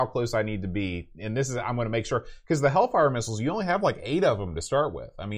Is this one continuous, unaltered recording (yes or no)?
yes